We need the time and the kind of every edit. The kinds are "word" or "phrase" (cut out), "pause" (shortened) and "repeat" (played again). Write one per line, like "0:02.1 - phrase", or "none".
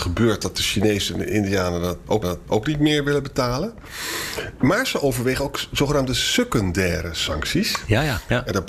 0:02.2 - repeat